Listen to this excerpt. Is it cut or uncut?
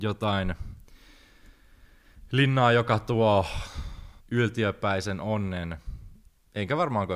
cut